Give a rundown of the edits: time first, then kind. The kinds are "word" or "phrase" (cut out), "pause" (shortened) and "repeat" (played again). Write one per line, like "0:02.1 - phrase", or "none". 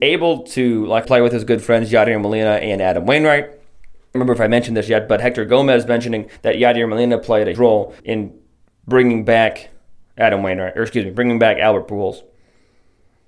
0:01.0 - phrase
0:04.1 - word
0:06.4 - pause
0:07.5 - word
0:08.0 - pause